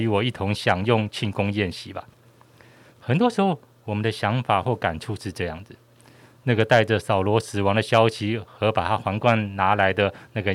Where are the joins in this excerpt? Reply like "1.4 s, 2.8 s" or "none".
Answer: none